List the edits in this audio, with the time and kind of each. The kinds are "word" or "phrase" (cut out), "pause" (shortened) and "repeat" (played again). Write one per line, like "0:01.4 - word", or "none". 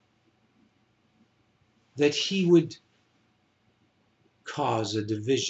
none